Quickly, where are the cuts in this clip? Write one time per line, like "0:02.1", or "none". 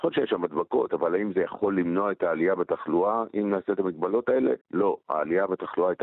0:04.6